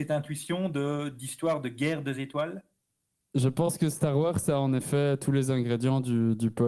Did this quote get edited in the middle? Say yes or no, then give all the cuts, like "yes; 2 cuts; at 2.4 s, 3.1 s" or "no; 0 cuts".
no; 0 cuts